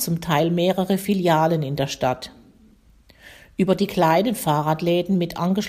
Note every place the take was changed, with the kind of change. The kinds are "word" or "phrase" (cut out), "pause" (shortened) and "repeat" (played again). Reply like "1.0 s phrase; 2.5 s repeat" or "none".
none